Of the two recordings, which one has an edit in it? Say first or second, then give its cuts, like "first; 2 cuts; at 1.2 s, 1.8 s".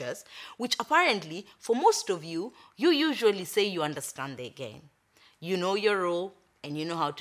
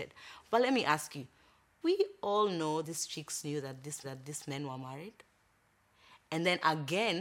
second; 3 cuts; at 1.8 s, 2.8 s, 4.0 s